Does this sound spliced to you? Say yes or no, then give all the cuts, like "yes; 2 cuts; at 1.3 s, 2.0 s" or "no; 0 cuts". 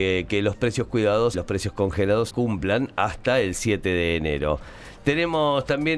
yes; 2 cuts; at 1.3 s, 2.3 s